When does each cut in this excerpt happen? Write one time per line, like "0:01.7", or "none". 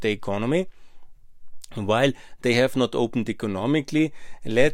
none